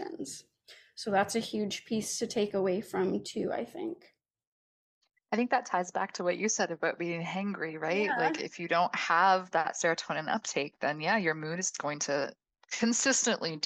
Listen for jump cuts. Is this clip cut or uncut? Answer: uncut